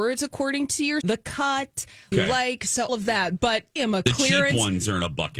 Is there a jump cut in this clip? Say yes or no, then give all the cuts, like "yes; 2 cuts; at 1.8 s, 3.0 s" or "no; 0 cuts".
yes; 4 cuts; at 1.0 s, 2.1 s, 2.9 s, 3.8 s